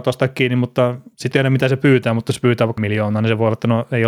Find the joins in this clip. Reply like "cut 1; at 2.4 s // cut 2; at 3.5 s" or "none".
cut 1; at 1.3 s // cut 2; at 2.8 s